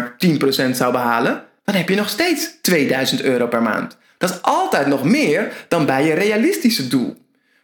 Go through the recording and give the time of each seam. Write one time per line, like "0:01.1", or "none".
0:01.6